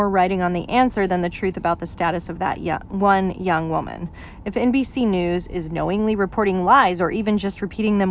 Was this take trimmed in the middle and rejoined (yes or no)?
no